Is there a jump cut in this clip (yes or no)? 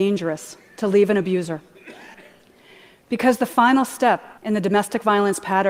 yes